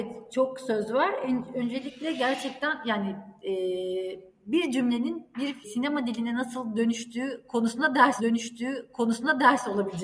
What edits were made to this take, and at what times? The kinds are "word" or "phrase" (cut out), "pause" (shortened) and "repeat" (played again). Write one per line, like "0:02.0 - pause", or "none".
0:05.6 - word
0:08.2 - repeat